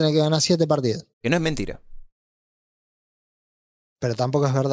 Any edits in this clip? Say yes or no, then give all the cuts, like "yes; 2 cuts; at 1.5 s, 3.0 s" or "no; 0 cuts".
yes; 1 cut; at 1.1 s